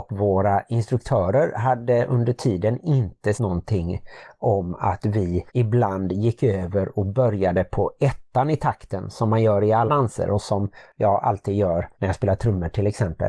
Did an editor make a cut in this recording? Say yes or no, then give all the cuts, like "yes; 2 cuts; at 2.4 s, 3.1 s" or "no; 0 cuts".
yes; 4 cuts; at 3.4 s, 5.5 s, 9.9 s, 11.9 s